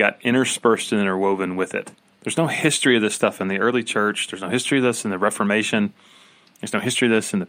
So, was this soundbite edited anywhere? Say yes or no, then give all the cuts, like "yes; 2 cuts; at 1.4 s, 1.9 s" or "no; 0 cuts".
no; 0 cuts